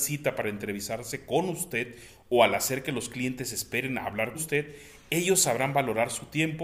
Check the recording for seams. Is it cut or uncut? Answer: cut